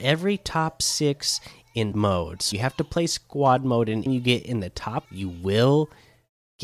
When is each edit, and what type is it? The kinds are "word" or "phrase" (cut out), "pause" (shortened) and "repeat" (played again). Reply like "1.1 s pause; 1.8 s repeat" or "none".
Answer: 1.9 s word; 2.5 s word; 4.1 s word; 5.0 s word